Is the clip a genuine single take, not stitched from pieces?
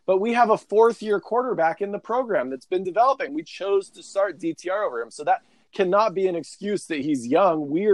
yes; 0 cuts

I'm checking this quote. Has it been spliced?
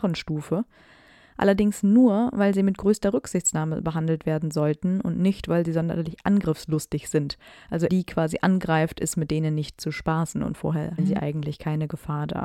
yes; 2 cuts; at 7.9 s, 11.0 s

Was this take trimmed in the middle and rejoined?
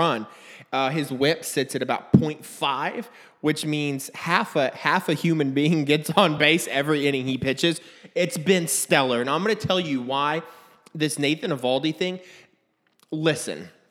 no; 0 cuts

